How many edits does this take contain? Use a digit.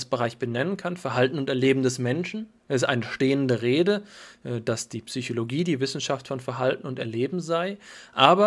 1